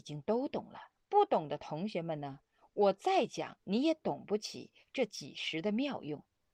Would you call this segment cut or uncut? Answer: cut